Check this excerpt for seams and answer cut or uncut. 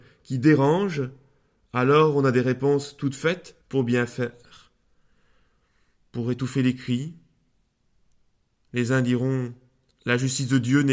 cut